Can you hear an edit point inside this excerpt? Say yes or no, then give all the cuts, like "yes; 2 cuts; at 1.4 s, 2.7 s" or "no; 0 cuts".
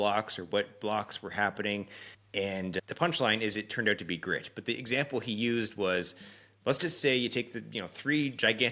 no; 0 cuts